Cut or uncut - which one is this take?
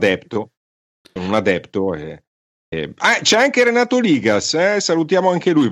uncut